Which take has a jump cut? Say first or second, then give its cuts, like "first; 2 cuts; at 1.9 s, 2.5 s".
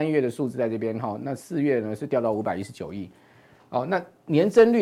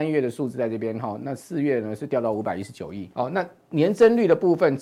second; 1 cut; at 3.1 s